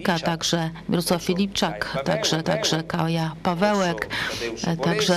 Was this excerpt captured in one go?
no; 1 cut; at 2.4 s

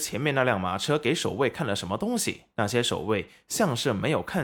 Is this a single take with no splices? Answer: no; 1 cut; at 2.5 s

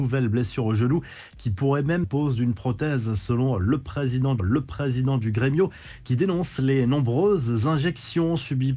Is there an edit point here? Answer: yes; 2 cuts; at 2.0 s, 4.4 s

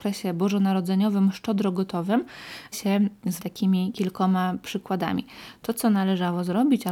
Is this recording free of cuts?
no; 2 cuts; at 2.7 s, 3.4 s

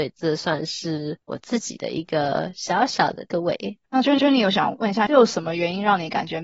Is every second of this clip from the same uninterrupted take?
no; 3 cuts; at 3.3 s, 3.8 s, 4.2 s

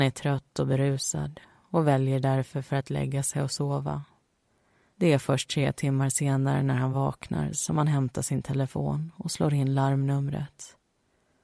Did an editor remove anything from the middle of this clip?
no; 0 cuts

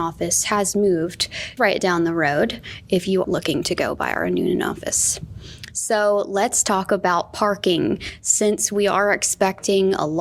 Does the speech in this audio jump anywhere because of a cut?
yes; 2 cuts; at 1.6 s, 3.2 s

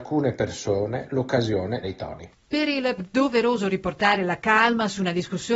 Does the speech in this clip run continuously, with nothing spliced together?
no; 3 cuts; at 1.8 s, 2.4 s, 3.0 s

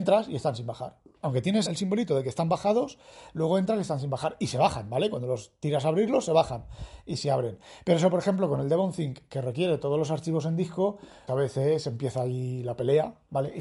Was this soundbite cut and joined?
yes; 2 cuts; at 1.7 s, 11.3 s

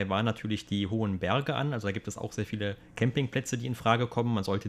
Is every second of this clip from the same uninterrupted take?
yes; 0 cuts

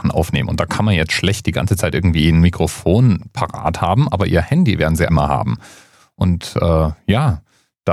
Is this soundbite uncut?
no; 1 cut; at 5.1 s

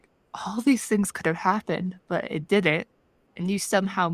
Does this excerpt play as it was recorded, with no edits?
yes; 0 cuts

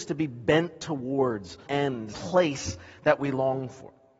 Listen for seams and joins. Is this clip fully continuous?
no; 2 cuts; at 1.7 s, 2.1 s

